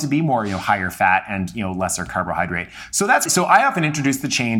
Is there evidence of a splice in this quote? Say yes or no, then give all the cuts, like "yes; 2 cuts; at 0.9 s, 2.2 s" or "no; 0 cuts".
yes; 1 cut; at 3.3 s